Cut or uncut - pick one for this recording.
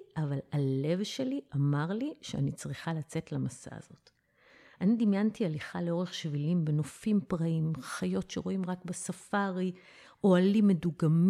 uncut